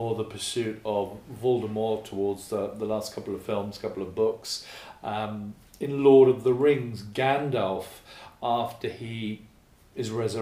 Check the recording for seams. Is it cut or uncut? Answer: uncut